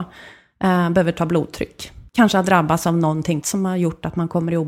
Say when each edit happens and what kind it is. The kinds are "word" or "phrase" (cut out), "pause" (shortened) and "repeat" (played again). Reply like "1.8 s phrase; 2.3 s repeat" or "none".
2.1 s pause; 3.4 s word